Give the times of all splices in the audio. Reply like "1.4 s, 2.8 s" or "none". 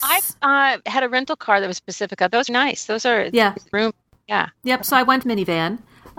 2.5 s, 3.7 s, 5.2 s